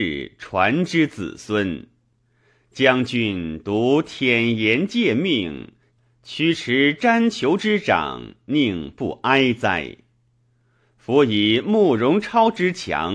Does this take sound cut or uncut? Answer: uncut